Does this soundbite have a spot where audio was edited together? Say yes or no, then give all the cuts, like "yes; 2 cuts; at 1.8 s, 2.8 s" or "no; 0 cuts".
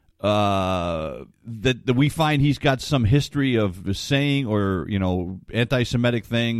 yes; 1 cut; at 1.3 s